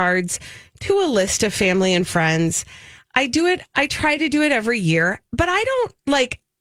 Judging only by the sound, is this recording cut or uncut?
uncut